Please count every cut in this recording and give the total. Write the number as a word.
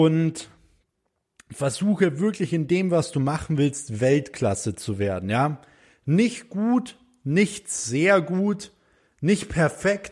zero